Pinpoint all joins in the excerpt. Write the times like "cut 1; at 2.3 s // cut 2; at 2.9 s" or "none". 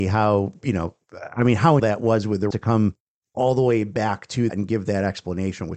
cut 1; at 1.8 s // cut 2; at 2.5 s // cut 3; at 4.5 s